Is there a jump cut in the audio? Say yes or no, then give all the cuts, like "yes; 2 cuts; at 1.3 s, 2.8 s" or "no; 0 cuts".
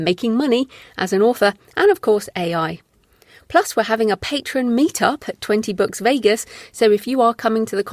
no; 0 cuts